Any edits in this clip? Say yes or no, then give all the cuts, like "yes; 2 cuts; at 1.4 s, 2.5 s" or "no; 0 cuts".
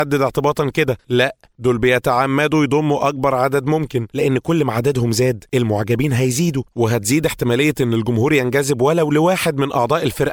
no; 0 cuts